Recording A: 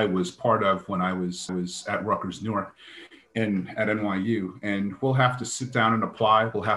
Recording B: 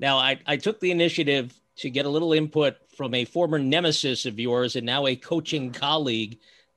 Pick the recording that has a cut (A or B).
A